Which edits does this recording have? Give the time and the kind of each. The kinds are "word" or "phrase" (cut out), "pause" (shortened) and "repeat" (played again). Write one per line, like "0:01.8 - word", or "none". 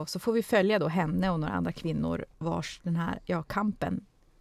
0:02.3 - pause